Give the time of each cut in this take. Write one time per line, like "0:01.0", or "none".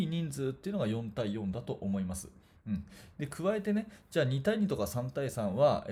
none